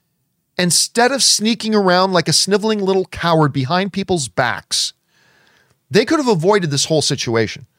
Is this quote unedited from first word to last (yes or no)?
yes